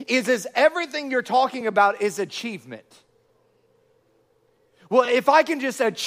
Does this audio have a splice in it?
no; 0 cuts

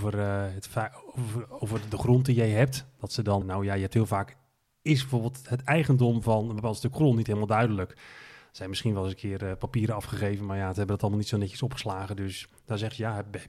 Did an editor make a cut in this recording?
yes; 1 cut; at 3.4 s

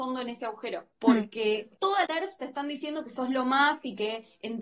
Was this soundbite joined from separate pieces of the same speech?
yes; 1 cut; at 2.1 s

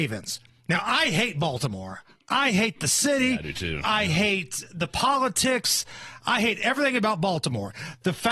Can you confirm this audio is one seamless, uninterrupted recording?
yes; 0 cuts

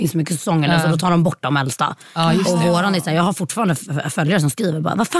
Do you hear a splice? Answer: no; 0 cuts

